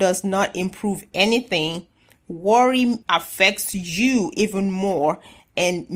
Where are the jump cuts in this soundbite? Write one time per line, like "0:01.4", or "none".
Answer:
0:03.0